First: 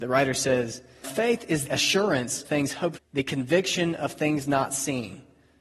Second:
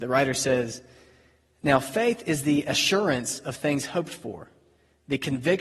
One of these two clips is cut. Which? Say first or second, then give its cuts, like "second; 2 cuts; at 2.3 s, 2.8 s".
first; 4 cuts; at 1.0 s, 1.7 s, 2.4 s, 3.0 s